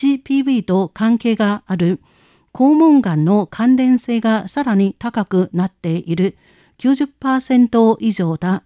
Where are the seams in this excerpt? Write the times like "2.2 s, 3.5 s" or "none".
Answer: none